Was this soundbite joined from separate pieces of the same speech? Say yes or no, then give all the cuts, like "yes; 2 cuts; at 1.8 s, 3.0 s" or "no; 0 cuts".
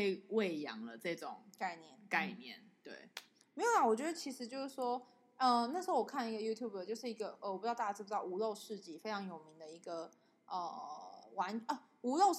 no; 0 cuts